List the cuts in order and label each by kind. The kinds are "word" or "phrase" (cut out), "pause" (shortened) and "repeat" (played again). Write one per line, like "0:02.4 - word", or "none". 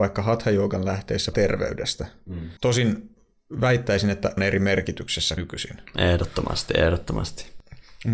0:01.3 - word
0:02.6 - pause
0:04.4 - word
0:05.4 - word